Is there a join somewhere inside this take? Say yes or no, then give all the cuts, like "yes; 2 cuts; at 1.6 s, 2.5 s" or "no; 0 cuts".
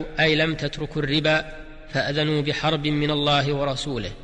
no; 0 cuts